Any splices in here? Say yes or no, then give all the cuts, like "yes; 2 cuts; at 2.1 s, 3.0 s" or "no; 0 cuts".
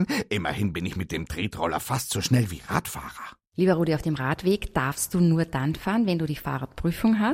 no; 0 cuts